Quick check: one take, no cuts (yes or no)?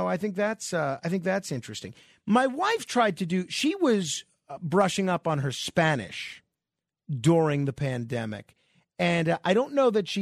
yes